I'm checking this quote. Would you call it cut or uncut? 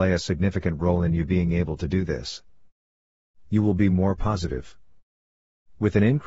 uncut